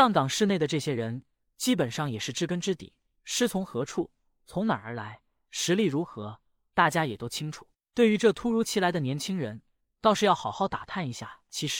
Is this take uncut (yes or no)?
yes